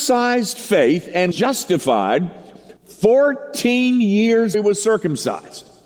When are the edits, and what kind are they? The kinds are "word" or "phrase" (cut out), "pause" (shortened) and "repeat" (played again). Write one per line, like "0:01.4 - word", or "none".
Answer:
0:01.3 - word
0:02.8 - pause
0:04.5 - word